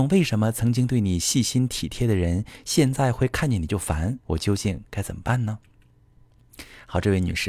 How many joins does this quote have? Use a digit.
1